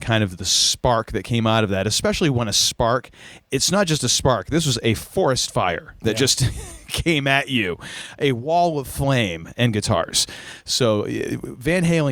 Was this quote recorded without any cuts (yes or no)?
yes